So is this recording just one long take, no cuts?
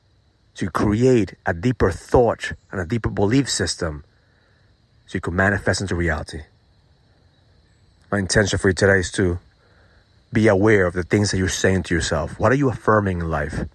yes; 0 cuts

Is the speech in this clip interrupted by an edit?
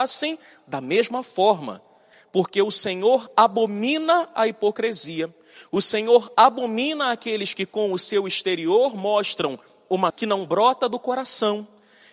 yes; 1 cut; at 10.1 s

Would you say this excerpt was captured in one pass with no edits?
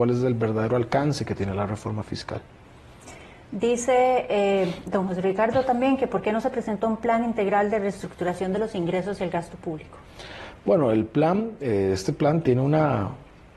yes; 0 cuts

